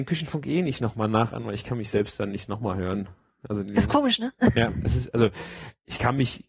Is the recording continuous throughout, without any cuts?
yes; 0 cuts

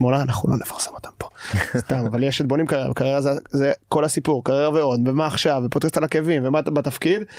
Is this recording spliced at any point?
no; 0 cuts

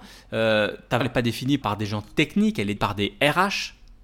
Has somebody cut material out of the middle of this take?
yes; 3 cuts; at 1.0 s, 1.6 s, 2.8 s

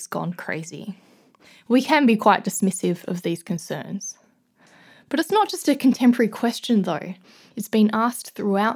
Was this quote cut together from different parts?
no; 0 cuts

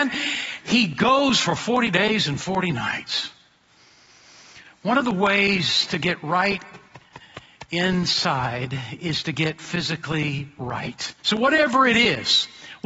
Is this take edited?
yes; 1 cut; at 11.2 s

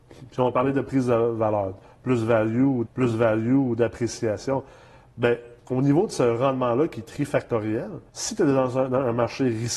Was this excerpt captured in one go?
no; 3 cuts; at 2.8 s, 5.6 s, 8.1 s

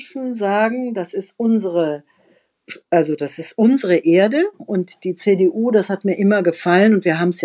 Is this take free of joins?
yes; 0 cuts

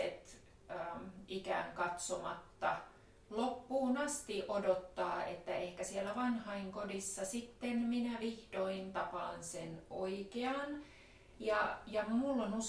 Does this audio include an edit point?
no; 0 cuts

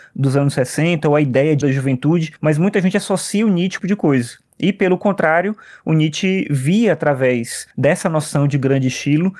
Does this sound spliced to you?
yes; 4 cuts; at 1.6 s, 2.4 s, 3.8 s, 7.7 s

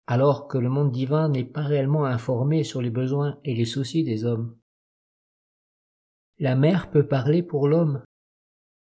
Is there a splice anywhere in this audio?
no; 0 cuts

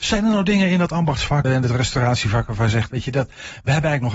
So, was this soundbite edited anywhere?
yes; 1 cut; at 1.4 s

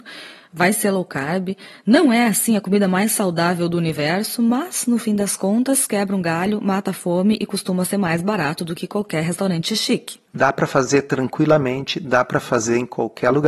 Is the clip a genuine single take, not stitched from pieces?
no; 1 cut; at 10.3 s

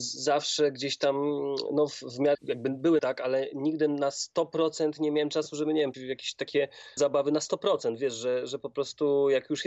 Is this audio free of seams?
no; 4 cuts; at 2.3 s, 3.0 s, 5.9 s, 7.0 s

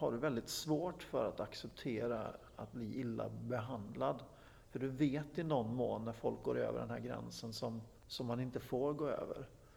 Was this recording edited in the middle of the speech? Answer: yes; 1 cut; at 8.0 s

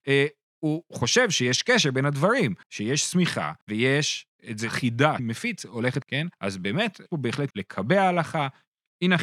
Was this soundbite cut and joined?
yes; 6 cuts; at 2.6 s, 3.6 s, 5.2 s, 6.0 s, 6.3 s, 7.5 s

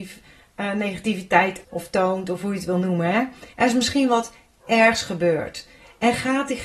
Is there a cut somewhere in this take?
yes; 2 cuts; at 1.6 s, 3.5 s

